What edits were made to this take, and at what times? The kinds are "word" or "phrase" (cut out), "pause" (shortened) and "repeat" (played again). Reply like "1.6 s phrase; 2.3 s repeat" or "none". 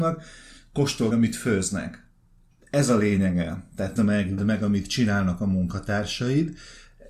1.1 s word; 4.0 s word; 4.4 s word